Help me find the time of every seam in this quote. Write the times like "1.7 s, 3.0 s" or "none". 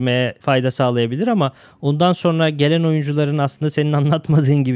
none

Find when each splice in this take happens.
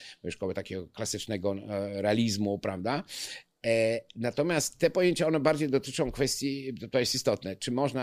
none

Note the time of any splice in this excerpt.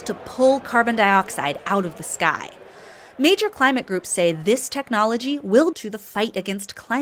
5.7 s

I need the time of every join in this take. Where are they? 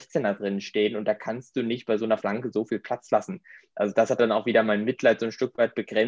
none

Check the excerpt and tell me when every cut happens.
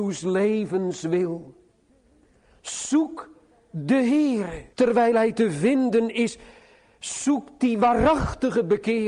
4.7 s

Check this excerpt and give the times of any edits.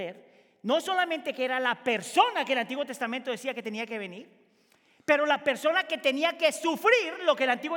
none

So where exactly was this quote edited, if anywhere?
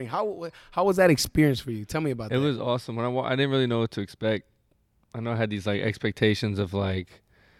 none

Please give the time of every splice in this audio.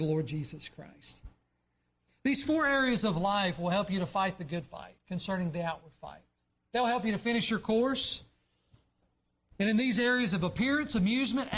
5.0 s

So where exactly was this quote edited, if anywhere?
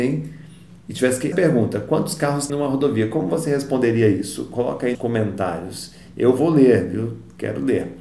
1.3 s, 2.5 s, 4.9 s

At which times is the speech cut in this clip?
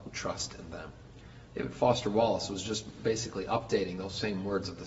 1.5 s

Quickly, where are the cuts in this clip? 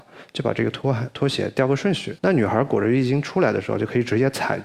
2.2 s

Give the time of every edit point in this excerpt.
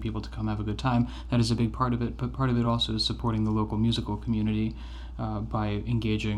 none

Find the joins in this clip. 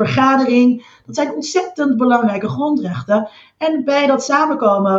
none

